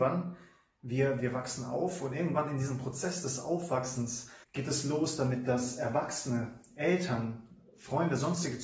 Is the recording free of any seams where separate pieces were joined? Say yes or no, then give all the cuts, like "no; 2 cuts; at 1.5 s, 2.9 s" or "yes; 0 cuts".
no; 2 cuts; at 1.2 s, 4.4 s